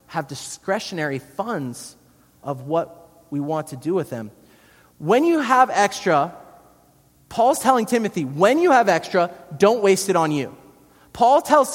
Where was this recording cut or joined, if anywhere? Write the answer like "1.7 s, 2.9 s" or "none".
none